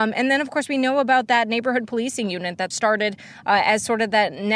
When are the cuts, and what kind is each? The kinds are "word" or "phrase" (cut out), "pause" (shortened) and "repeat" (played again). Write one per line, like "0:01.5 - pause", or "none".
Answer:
0:02.7 - phrase

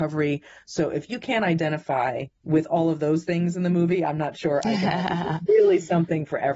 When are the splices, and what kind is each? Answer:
0:02.3 - pause

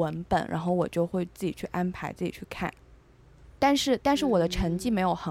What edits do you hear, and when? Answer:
0:03.5 - pause

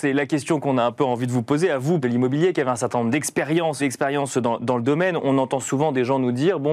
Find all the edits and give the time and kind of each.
0:02.0 - word
0:03.8 - word

